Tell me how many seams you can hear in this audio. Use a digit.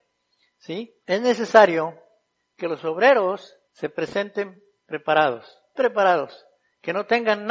4